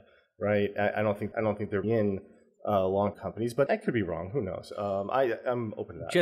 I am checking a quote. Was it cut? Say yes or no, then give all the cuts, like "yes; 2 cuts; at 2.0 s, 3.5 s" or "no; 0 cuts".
yes; 4 cuts; at 1.3 s, 1.8 s, 3.1 s, 3.7 s